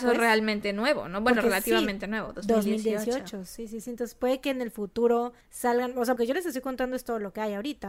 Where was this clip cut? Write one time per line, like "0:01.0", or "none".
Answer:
0:05.4
0:06.2